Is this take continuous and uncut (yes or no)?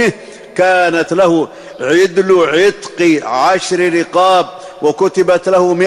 yes